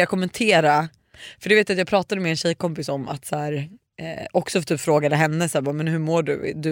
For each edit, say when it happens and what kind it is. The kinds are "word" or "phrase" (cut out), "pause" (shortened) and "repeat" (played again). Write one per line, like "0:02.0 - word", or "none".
none